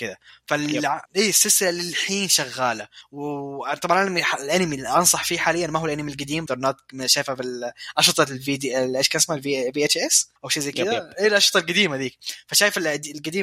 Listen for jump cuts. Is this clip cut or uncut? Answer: cut